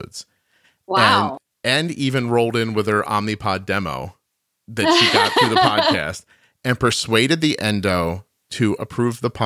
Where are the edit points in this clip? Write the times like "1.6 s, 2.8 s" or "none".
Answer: none